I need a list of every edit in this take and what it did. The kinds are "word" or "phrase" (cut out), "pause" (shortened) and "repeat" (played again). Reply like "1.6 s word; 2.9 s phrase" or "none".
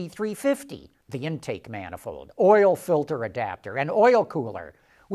1.0 s word